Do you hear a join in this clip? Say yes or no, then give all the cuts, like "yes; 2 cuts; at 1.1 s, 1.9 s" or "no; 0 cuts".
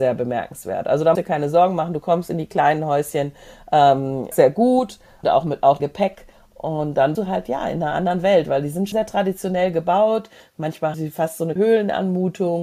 yes; 8 cuts; at 1.2 s, 4.3 s, 5.2 s, 5.8 s, 7.1 s, 8.9 s, 10.9 s, 11.6 s